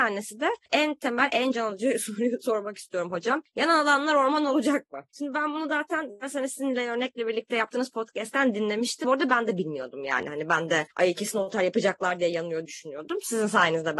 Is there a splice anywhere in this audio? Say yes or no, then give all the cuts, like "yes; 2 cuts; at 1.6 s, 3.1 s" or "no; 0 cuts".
yes; 3 cuts; at 5.1 s, 9.0 s, 12.6 s